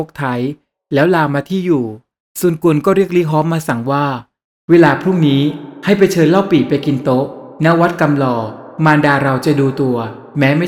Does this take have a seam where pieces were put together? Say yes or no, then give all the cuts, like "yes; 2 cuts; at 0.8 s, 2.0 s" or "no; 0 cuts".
no; 0 cuts